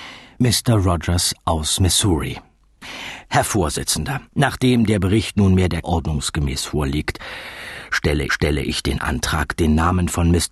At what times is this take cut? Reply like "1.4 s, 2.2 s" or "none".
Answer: 4.3 s, 5.8 s, 8.3 s